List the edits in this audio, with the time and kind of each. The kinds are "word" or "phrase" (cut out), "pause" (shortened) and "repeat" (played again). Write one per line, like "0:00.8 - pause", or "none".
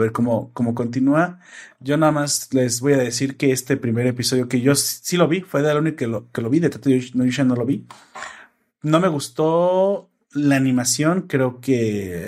none